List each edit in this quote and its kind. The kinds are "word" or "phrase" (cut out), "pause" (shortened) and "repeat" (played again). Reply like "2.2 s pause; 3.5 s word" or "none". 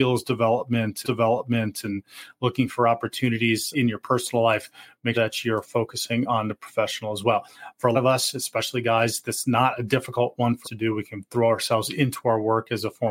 1.0 s repeat; 3.7 s word; 5.1 s word; 7.9 s word; 10.6 s word